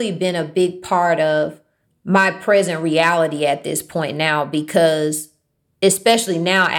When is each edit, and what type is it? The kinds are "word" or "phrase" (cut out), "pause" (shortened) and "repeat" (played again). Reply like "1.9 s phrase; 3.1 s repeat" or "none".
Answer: 1.8 s pause